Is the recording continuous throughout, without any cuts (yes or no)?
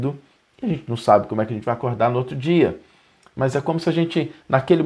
yes